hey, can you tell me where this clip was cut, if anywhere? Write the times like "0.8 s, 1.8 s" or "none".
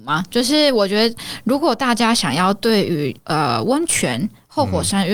3.2 s